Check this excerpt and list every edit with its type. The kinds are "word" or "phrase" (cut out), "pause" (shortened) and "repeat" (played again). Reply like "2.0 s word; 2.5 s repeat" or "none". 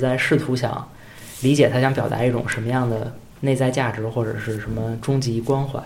3.3 s pause